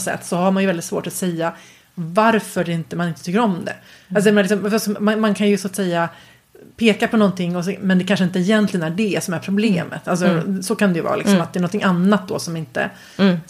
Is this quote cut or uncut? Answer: uncut